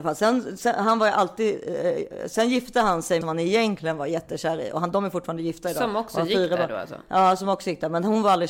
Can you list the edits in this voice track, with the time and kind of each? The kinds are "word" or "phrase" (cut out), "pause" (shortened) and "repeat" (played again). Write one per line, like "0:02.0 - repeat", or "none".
0:03.2 - phrase